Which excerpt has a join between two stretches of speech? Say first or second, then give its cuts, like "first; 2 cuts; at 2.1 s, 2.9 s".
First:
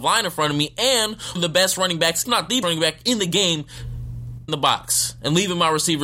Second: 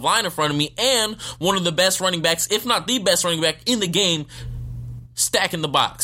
first; 4 cuts; at 1.4 s, 2.3 s, 2.6 s, 4.5 s